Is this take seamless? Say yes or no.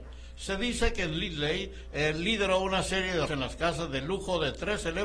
no